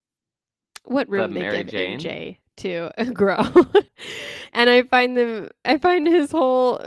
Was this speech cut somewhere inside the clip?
yes; 1 cut; at 3.9 s

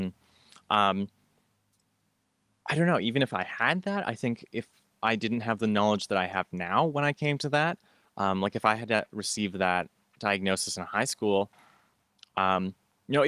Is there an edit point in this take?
no; 0 cuts

